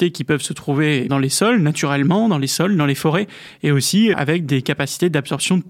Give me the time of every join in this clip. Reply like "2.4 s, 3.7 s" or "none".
1.1 s, 4.1 s